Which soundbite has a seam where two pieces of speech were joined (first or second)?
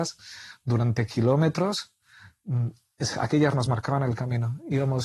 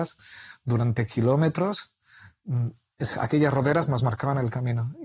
first